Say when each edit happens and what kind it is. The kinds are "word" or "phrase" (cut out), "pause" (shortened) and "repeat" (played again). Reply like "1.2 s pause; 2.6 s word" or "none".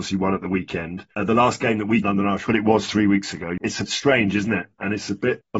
2.0 s phrase; 2.5 s phrase; 3.8 s word